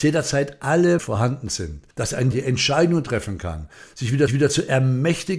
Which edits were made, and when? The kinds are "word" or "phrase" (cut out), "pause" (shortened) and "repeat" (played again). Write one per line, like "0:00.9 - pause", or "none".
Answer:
0:01.0 - word
0:01.9 - pause
0:02.3 - word
0:04.3 - repeat

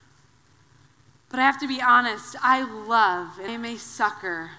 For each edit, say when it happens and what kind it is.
0:03.5 - word

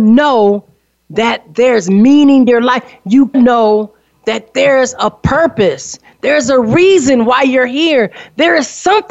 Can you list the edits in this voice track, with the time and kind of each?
0:02.5 - word
0:03.3 - word

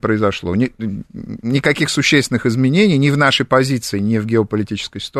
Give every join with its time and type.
none

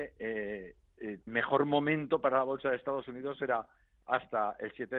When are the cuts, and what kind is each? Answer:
0:01.3 - word

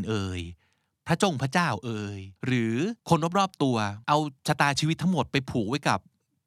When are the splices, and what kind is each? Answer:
0:02.4 - pause
0:03.0 - pause
0:04.0 - pause

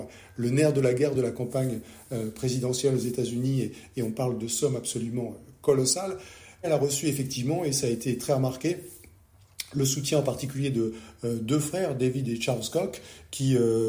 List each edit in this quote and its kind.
none

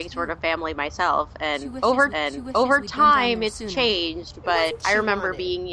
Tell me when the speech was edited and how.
0:02.1 - repeat
0:04.8 - word

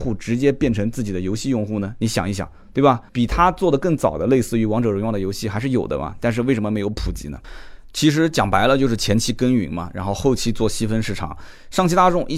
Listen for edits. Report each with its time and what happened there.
0:03.1 - pause

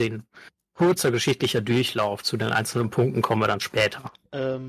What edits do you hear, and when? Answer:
none

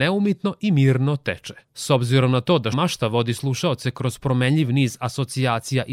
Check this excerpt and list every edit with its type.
0:01.6 - pause
0:02.7 - word

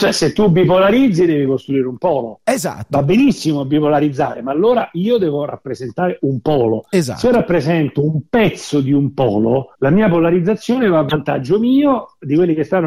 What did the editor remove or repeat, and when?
0:09.7 - pause

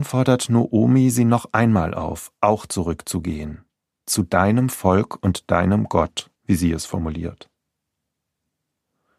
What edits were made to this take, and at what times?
0:06.4 - pause

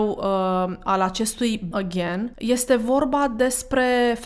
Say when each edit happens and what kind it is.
0:01.7 - word
0:02.3 - word

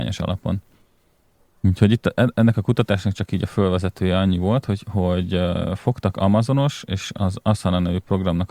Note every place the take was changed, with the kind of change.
none

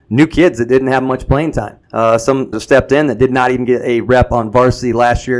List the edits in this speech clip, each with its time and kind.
0:01.8 - pause
0:02.5 - word

